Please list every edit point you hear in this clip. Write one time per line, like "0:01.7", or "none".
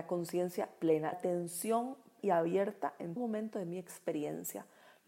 0:01.1
0:02.2
0:03.2